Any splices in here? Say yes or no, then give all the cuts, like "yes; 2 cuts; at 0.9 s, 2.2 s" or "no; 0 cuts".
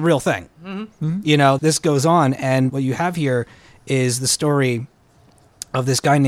yes; 2 cuts; at 1.6 s, 2.7 s